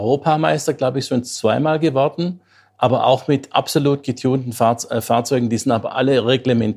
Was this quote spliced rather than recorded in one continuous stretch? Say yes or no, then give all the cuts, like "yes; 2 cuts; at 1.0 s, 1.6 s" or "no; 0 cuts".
no; 0 cuts